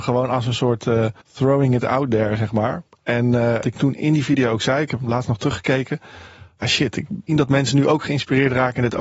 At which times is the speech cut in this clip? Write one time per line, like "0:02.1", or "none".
0:01.2
0:03.6
0:06.6
0:07.3

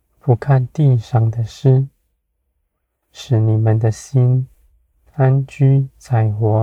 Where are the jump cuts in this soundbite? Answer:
none

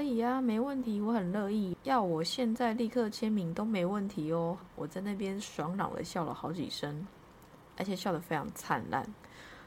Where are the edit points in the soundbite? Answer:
0:04.6

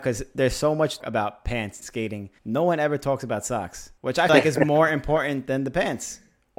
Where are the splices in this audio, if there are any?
0:01.0
0:01.8
0:02.4
0:04.0
0:04.3

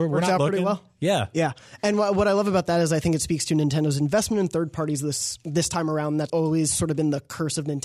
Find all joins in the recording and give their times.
0:06.3

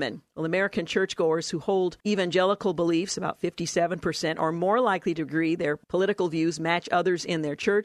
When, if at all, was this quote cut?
0:02.0
0:05.8

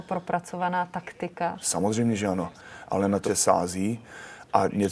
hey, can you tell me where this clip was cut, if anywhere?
0:03.2

